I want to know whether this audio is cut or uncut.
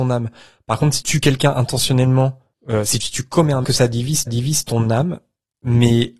cut